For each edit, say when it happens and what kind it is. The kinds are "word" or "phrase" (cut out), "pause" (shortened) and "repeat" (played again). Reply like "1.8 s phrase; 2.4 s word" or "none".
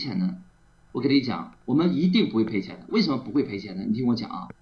none